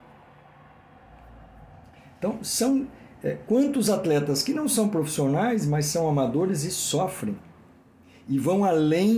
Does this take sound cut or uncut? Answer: uncut